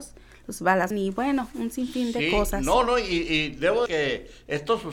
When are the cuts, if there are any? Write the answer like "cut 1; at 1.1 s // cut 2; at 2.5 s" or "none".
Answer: cut 1; at 0.9 s // cut 2; at 3.9 s